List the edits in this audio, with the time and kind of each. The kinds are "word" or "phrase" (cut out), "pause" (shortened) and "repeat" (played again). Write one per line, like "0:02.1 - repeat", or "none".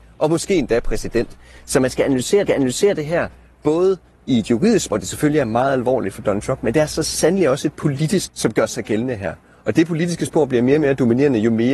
0:02.5 - repeat
0:04.9 - word
0:08.3 - word